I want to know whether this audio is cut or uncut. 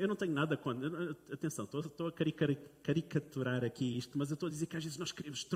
uncut